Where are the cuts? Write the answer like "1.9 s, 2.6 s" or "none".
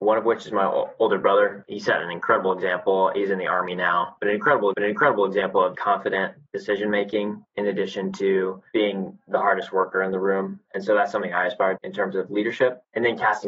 4.7 s, 5.7 s, 6.5 s, 11.8 s